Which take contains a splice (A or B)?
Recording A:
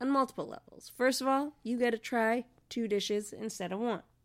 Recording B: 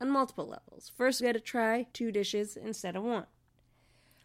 B